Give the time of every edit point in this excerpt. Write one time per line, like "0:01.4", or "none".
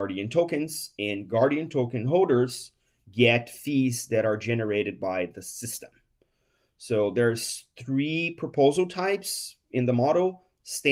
none